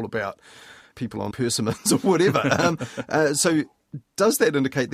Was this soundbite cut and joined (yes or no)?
yes